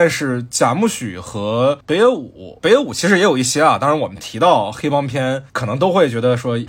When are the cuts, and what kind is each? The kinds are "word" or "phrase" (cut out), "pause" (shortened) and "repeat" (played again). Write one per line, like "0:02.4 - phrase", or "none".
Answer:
0:02.6 - word